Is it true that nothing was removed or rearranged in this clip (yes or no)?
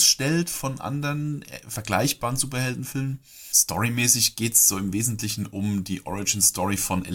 yes